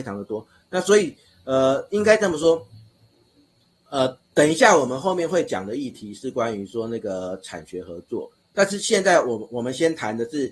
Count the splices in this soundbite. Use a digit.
1